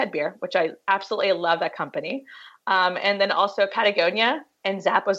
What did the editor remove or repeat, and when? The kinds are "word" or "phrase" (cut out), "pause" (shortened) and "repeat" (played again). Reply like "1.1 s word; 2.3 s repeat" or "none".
none